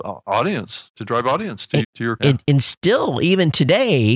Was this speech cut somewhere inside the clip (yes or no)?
yes